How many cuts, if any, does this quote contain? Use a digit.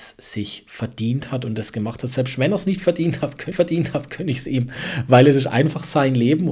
1